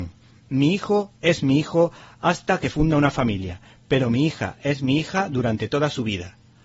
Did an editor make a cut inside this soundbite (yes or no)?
no